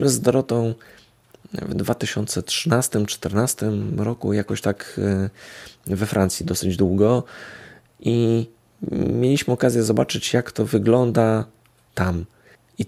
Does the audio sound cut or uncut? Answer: uncut